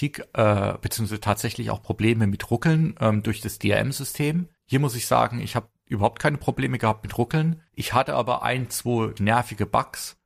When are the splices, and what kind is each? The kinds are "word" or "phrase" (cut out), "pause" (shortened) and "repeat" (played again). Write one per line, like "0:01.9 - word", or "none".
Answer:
0:07.7 - pause
0:09.2 - word